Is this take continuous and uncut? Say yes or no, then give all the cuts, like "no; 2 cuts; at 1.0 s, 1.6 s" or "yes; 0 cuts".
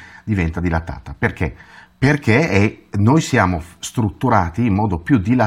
yes; 0 cuts